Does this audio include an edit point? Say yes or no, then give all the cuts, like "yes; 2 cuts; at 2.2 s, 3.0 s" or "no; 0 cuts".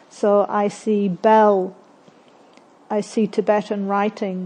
no; 0 cuts